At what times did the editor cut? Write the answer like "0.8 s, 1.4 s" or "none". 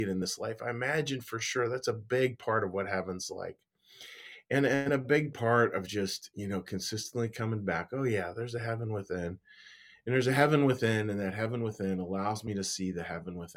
none